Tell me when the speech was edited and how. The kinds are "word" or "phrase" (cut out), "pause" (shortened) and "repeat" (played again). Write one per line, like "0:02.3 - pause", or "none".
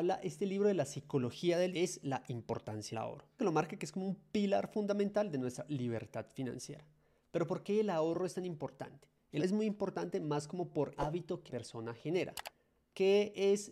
0:01.7 - word
0:02.9 - word
0:03.4 - word
0:09.4 - word
0:10.9 - word
0:11.5 - word